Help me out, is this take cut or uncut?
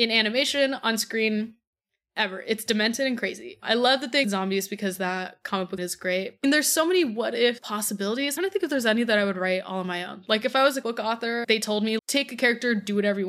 cut